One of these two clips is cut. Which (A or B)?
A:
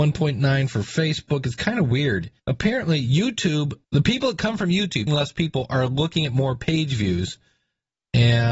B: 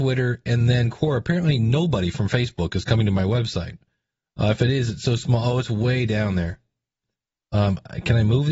A